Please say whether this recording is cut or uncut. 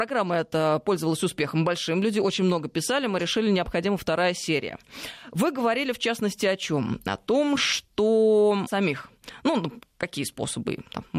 cut